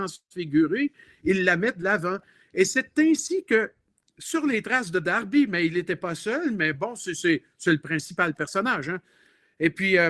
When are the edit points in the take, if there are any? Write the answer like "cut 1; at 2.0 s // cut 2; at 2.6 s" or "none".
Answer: none